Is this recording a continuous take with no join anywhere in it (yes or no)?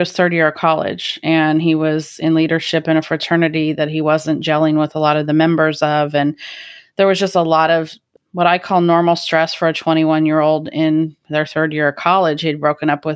yes